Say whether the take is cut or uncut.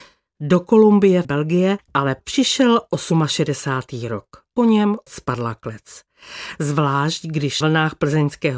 cut